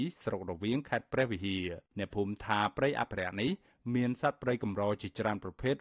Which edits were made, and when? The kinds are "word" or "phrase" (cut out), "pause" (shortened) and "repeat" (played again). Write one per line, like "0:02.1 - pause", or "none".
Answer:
0:01.9 - pause